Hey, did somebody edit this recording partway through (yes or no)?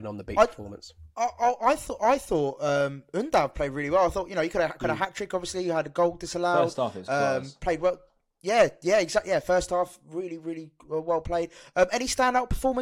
no